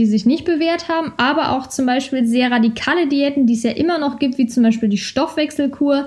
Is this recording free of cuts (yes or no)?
yes